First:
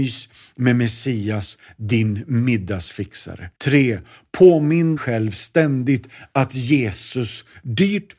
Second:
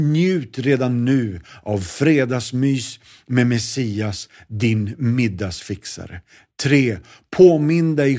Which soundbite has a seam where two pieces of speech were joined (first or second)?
first